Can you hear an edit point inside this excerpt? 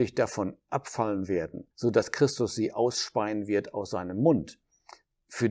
yes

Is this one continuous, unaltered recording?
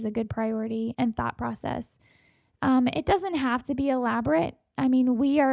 no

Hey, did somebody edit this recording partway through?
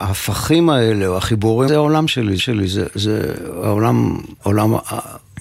yes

